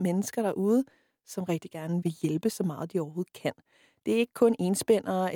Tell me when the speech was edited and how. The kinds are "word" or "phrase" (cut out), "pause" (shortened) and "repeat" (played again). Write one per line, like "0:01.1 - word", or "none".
0:02.0 - word

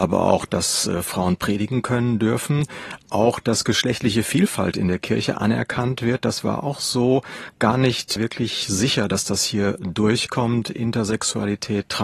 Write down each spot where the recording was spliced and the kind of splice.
none

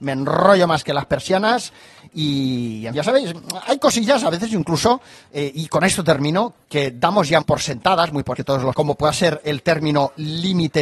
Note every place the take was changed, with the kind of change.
0:02.9 - word
0:06.6 - word
0:07.4 - word
0:08.3 - word
0:08.7 - word

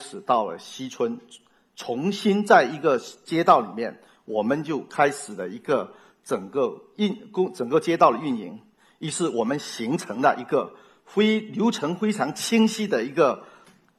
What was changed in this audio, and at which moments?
none

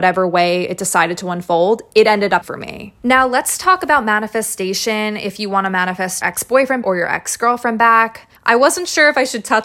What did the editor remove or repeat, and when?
0:02.4 - word
0:06.2 - word
0:06.8 - word
0:08.4 - pause

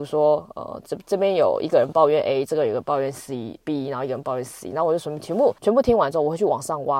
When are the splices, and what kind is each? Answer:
0:05.6 - pause

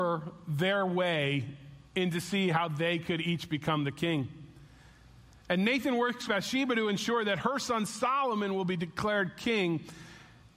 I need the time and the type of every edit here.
0:01.9 - pause
0:06.3 - word

